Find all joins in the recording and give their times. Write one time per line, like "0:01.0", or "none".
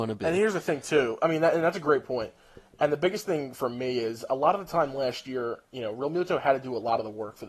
none